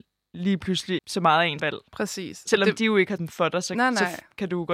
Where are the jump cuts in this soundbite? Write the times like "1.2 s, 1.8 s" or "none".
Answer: 1.0 s, 1.6 s, 3.2 s